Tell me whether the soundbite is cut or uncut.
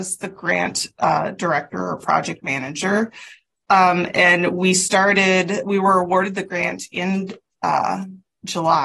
uncut